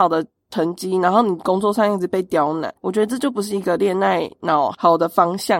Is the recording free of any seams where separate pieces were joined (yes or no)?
no